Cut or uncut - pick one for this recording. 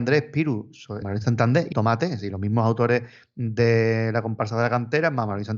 cut